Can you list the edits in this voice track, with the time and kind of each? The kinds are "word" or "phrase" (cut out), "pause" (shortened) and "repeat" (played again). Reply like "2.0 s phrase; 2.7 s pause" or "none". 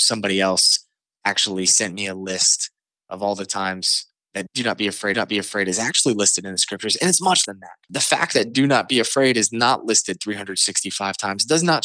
5.1 s repeat; 7.5 s word; 7.8 s pause